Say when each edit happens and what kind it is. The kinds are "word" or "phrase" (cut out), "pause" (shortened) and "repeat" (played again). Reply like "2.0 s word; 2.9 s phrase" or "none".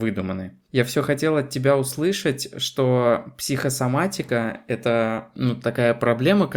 none